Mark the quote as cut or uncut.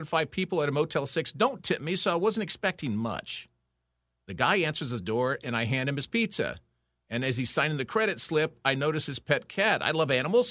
uncut